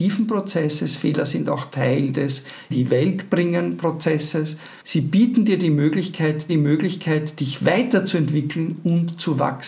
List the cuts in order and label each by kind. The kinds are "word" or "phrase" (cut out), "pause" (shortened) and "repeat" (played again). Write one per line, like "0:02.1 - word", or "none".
0:02.7 - word
0:04.8 - pause
0:06.5 - repeat